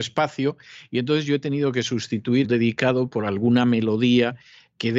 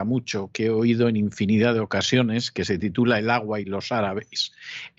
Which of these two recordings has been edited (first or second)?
first